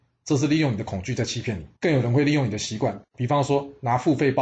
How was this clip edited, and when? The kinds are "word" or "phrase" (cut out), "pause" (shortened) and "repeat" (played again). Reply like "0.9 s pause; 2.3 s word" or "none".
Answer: 1.8 s pause